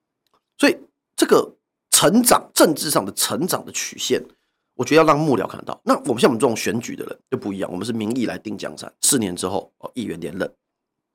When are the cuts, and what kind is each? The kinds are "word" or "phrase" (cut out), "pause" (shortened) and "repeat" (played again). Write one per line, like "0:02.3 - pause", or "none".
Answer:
0:07.2 - pause
0:09.0 - pause